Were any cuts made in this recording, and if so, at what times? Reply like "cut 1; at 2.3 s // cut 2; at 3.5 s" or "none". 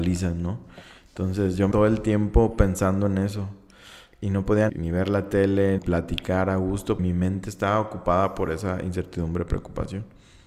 cut 1; at 1.7 s // cut 2; at 4.7 s // cut 3; at 5.8 s // cut 4; at 7.0 s

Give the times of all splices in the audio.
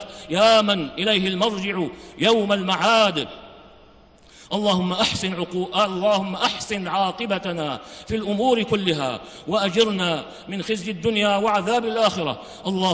none

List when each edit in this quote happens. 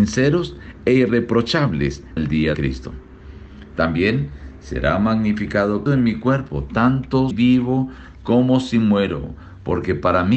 cut 1; at 2.2 s // cut 2; at 2.5 s // cut 3; at 5.9 s // cut 4; at 7.3 s

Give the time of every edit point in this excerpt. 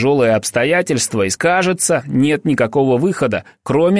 cut 1; at 1.4 s

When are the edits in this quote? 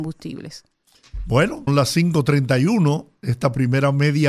cut 1; at 1.7 s

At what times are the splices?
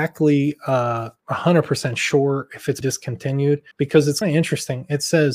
cut 1; at 1.2 s // cut 2; at 2.8 s // cut 3; at 3.7 s // cut 4; at 4.2 s

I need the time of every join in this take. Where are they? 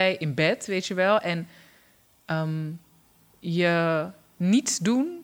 none

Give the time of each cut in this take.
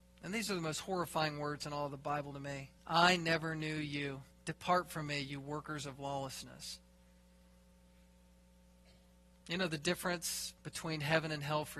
cut 1; at 2.8 s // cut 2; at 4.3 s // cut 3; at 10.6 s

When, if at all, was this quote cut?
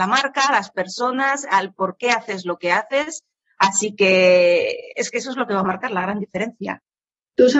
none

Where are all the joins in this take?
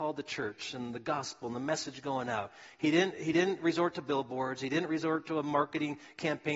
none

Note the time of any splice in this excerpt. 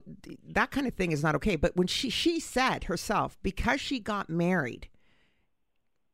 none

